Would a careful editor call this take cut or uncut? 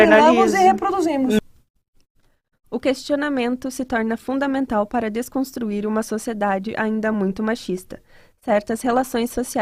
uncut